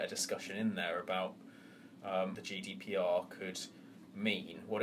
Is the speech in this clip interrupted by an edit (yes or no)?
yes